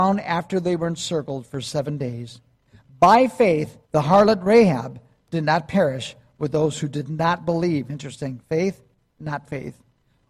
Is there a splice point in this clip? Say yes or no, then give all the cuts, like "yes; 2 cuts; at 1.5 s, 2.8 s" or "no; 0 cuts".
yes; 1 cut; at 3.8 s